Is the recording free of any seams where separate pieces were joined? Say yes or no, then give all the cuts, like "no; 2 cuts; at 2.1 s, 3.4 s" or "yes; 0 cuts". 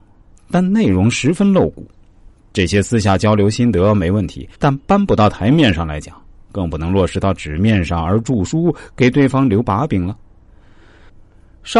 no; 1 cut; at 4.5 s